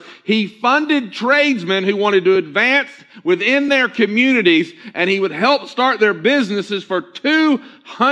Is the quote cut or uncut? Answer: uncut